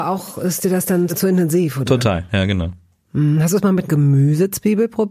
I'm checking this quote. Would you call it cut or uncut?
cut